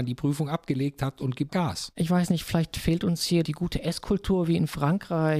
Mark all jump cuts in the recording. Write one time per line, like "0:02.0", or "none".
0:01.5